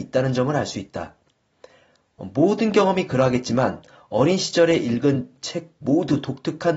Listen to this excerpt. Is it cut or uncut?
uncut